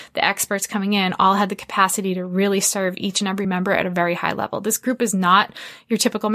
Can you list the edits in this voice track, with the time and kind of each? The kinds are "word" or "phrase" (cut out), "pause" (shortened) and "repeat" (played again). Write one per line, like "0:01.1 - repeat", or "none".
none